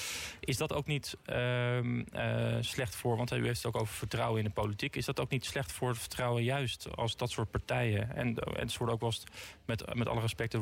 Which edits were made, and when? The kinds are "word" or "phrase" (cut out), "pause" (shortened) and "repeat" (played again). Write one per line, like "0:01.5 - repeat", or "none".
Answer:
none